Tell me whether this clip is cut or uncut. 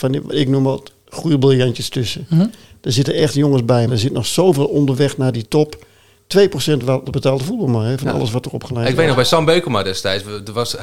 cut